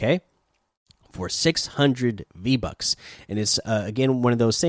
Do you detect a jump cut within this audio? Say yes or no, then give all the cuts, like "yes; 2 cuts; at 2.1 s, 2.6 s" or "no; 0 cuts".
no; 0 cuts